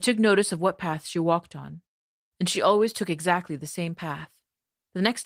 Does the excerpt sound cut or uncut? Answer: uncut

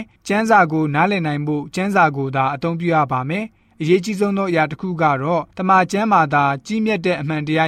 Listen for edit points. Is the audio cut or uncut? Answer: cut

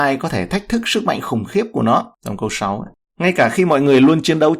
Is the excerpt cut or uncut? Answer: uncut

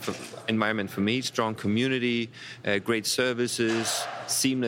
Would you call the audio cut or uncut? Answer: uncut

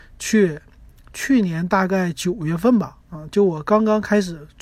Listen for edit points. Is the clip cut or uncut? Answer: cut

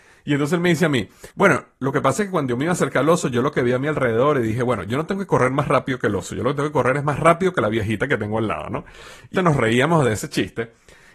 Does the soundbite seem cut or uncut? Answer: cut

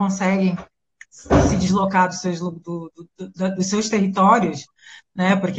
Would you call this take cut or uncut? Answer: uncut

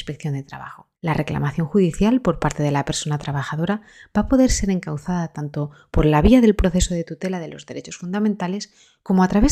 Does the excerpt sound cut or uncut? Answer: cut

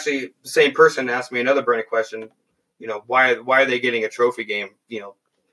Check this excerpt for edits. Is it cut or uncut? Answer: uncut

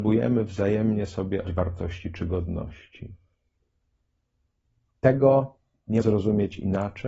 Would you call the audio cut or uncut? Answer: cut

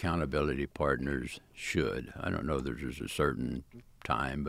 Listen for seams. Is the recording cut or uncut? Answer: uncut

